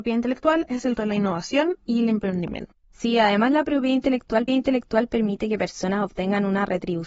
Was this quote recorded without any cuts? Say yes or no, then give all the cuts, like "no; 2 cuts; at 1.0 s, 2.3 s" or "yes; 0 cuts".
no; 3 cuts; at 1.0 s, 2.8 s, 4.5 s